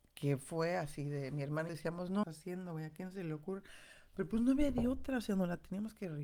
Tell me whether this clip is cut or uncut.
cut